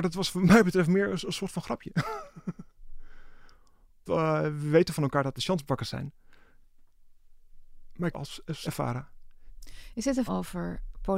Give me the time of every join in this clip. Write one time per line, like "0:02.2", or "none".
0:04.1
0:05.4
0:08.1
0:08.6
0:10.3